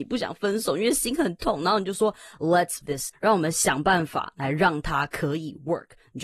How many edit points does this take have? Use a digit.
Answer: 2